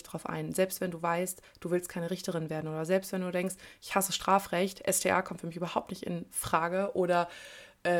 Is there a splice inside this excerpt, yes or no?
no